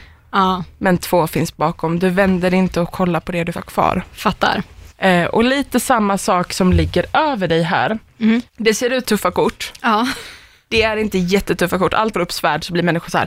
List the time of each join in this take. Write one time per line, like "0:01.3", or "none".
0:03.5
0:04.9
0:08.5
0:09.0
0:12.1